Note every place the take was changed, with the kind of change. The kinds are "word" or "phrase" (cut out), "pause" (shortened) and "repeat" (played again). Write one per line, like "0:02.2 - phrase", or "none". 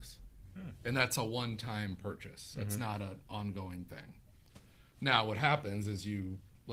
none